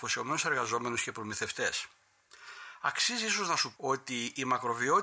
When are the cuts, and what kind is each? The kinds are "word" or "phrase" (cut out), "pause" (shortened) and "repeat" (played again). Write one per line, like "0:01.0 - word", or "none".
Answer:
0:03.8 - word